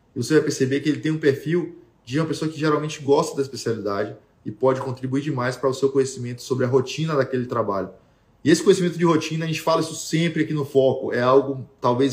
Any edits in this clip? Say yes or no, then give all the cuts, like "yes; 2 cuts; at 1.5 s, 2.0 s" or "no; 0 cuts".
no; 0 cuts